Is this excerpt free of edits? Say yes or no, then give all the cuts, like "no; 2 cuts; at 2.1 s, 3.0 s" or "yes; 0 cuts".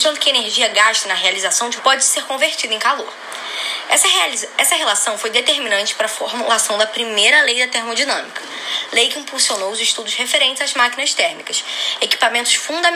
no; 1 cut; at 1.8 s